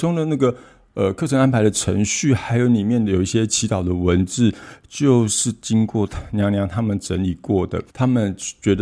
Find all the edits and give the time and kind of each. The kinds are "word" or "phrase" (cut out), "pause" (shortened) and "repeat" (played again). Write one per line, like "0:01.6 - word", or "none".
0:07.9 - pause